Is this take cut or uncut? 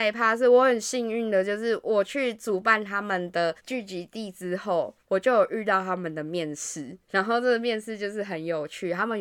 cut